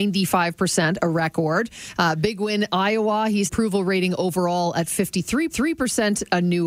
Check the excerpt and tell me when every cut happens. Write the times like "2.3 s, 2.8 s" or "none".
3.5 s, 5.5 s